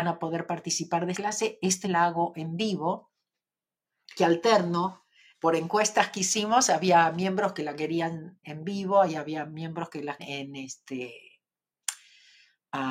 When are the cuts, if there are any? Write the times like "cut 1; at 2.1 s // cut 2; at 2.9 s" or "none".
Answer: cut 1; at 1.1 s // cut 2; at 1.8 s // cut 3; at 4.2 s // cut 4; at 5.3 s // cut 5; at 8.4 s // cut 6; at 10.2 s